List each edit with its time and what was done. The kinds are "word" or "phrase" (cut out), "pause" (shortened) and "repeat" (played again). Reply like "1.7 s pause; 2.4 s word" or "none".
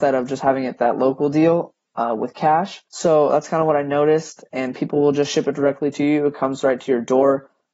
2.9 s pause